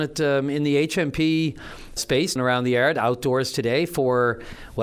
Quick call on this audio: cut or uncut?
cut